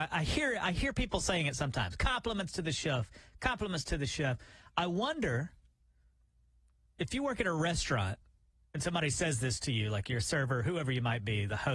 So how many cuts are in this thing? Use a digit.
0